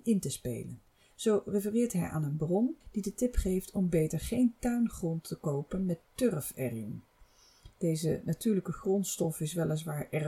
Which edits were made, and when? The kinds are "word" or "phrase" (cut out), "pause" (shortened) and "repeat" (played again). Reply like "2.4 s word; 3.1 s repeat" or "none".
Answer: 2.8 s pause

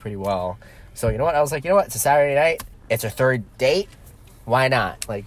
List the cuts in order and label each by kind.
2.7 s pause; 3.5 s pause

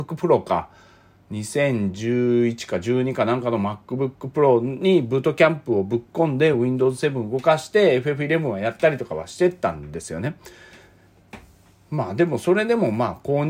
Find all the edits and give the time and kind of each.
none

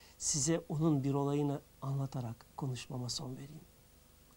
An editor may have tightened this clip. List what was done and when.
2.5 s pause

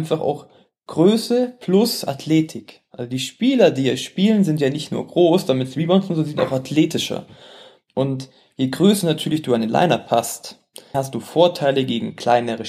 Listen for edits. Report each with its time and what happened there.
10.9 s phrase

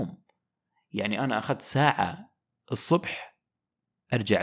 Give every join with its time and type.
none

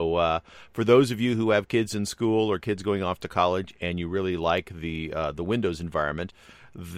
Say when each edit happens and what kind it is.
none

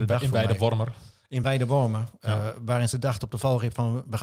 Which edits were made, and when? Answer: none

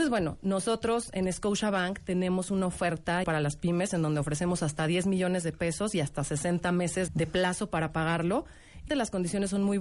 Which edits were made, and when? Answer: 3.2 s phrase; 7.1 s word; 8.9 s word

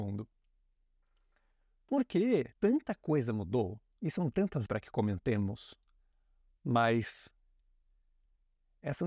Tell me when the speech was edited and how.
2.5 s pause; 4.7 s word

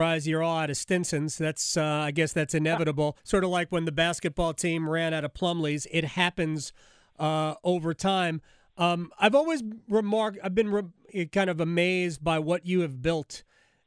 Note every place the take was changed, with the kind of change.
3.2 s pause

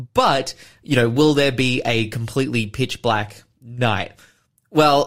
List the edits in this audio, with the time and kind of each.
none

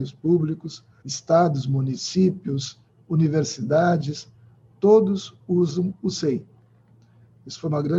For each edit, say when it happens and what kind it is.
1.0 s phrase

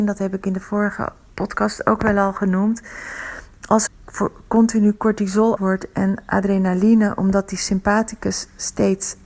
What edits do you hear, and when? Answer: 1.3 s pause; 3.9 s word; 5.6 s word

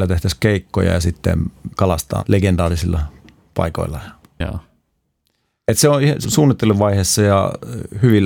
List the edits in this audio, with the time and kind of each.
1.7 s word; 2.2 s word; 6.2 s word

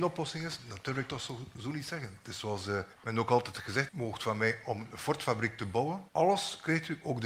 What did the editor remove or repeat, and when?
2.9 s pause; 3.9 s phrase; 4.6 s phrase; 6.1 s pause

